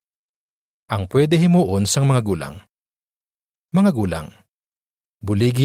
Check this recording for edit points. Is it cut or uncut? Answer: uncut